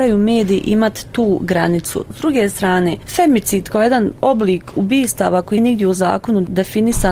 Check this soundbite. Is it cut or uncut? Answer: cut